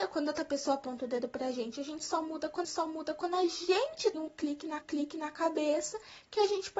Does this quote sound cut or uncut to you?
cut